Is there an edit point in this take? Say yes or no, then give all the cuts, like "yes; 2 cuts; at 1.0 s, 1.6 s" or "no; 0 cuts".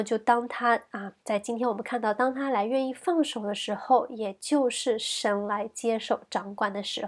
yes; 1 cut; at 1.2 s